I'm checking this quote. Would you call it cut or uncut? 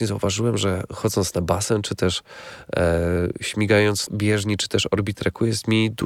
cut